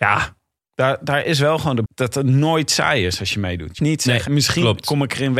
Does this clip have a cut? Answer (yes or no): yes